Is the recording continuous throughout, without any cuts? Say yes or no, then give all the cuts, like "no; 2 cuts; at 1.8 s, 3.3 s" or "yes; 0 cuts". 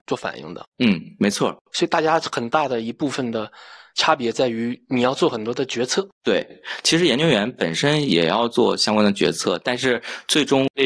yes; 0 cuts